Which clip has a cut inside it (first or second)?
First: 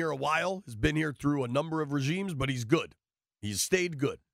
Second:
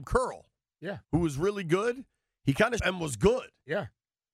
second